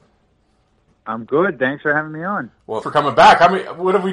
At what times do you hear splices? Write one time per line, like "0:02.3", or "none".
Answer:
0:02.8